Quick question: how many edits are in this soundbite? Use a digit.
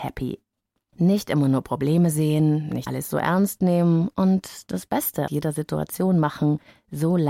2